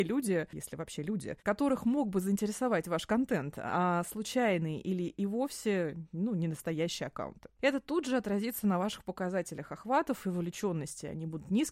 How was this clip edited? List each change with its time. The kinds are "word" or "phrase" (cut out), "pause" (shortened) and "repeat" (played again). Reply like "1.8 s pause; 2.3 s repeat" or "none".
none